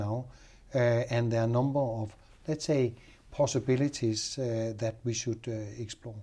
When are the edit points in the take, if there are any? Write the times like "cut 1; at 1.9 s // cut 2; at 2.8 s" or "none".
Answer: none